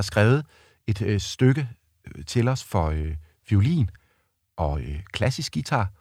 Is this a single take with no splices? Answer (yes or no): yes